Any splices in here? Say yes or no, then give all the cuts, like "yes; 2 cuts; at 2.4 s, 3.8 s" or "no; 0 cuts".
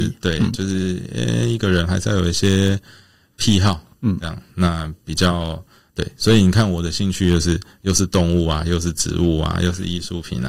no; 0 cuts